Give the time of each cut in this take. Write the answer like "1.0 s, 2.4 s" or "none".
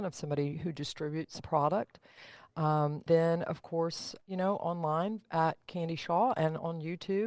1.4 s, 3.1 s, 4.2 s